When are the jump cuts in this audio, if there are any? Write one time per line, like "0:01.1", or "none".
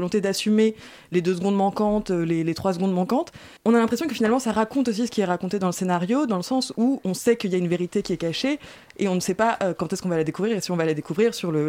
0:03.6